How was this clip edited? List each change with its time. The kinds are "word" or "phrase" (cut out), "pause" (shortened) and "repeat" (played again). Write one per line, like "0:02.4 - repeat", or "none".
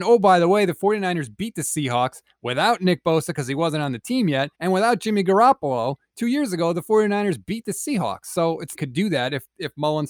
0:04.5 - pause
0:08.7 - phrase